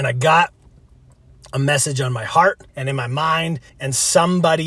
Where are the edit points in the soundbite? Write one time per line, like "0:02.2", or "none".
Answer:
0:02.7
0:03.7